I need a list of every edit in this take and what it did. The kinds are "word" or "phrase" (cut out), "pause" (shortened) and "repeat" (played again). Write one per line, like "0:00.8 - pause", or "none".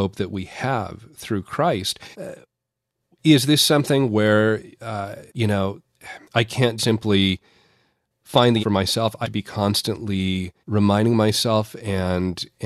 0:02.1 - pause
0:05.3 - pause
0:06.2 - pause
0:06.8 - word
0:08.6 - word
0:09.2 - word
0:10.6 - pause

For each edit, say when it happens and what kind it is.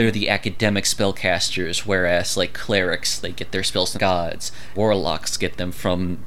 0:04.0 - word
0:04.8 - word

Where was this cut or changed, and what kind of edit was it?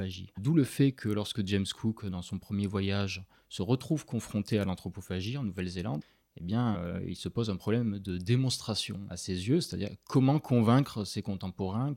none

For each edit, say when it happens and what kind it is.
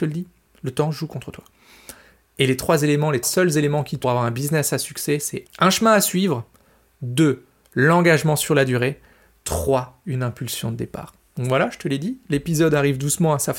0:03.2 - word
0:04.0 - phrase
0:05.5 - word

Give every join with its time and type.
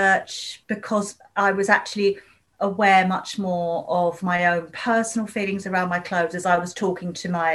none

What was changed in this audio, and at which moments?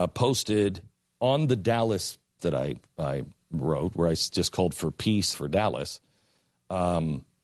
0:02.4 - word
0:05.3 - phrase

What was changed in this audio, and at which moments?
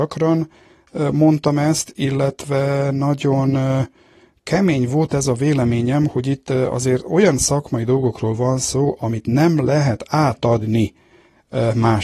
none

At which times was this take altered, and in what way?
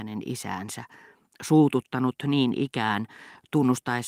none

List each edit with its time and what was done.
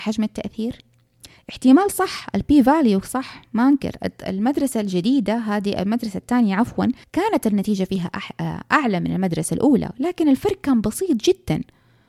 0:07.0 - pause

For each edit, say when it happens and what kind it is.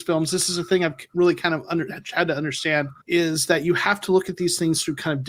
0:03.0 - pause

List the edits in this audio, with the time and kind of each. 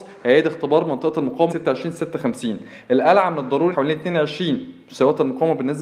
0:01.5 - word
0:03.7 - phrase

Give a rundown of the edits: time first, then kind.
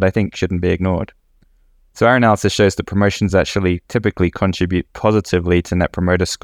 none

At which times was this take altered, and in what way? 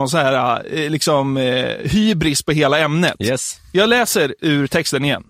none

